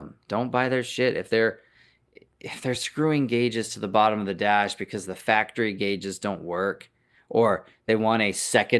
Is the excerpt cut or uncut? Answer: uncut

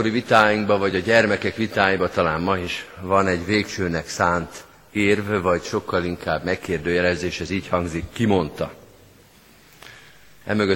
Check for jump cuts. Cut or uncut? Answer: uncut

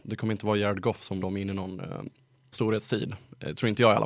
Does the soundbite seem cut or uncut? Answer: cut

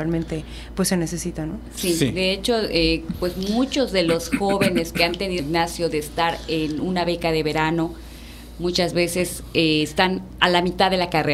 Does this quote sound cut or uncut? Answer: cut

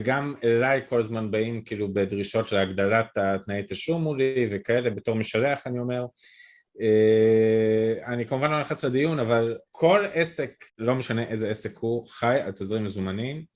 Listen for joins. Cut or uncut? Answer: cut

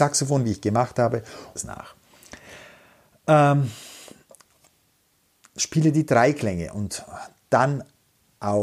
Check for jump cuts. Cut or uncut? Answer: cut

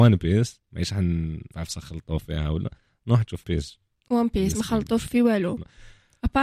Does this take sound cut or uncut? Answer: cut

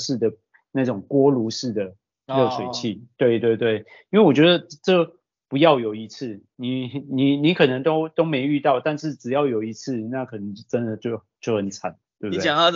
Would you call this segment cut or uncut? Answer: uncut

